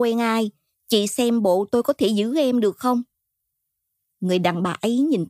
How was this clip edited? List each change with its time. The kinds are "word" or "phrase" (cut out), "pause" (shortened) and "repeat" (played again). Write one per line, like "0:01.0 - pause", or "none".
none